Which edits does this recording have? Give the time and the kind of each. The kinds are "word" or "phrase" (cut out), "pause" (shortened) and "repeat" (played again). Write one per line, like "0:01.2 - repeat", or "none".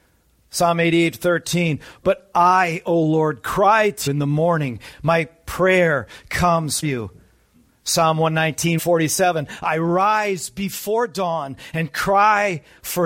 0:04.1 - word
0:06.8 - word
0:08.8 - word